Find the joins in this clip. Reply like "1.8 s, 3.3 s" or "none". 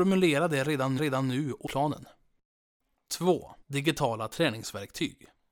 1.0 s, 1.7 s, 3.6 s

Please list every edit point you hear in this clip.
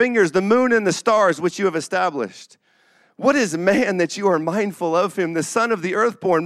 none

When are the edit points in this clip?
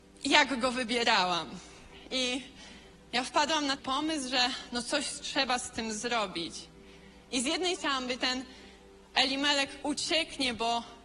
3.8 s, 7.7 s, 8.2 s, 9.8 s

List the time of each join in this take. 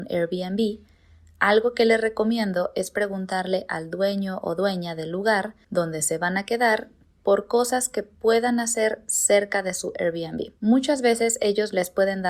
10.6 s

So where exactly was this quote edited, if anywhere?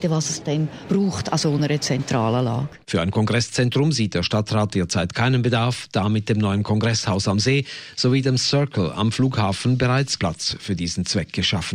2.8 s, 10.2 s

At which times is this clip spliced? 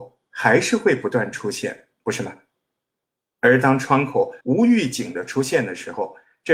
4.4 s

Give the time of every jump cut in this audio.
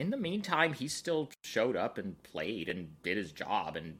none

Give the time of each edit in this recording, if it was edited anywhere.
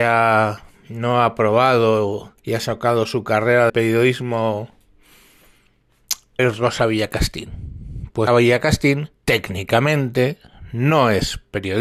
2.4 s, 3.7 s, 6.4 s, 8.3 s, 9.2 s

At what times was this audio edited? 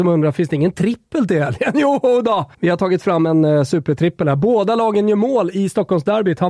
2.5 s

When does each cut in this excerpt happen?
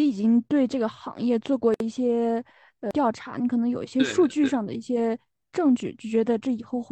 none

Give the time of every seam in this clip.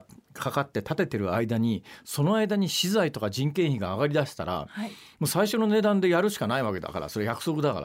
none

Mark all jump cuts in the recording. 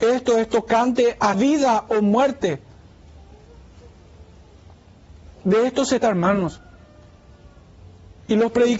1.3 s, 5.3 s, 6.0 s

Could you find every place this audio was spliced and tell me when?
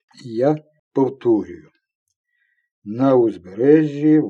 none

